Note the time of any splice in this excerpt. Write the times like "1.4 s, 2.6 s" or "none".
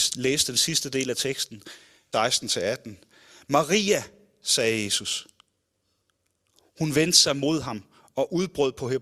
2.1 s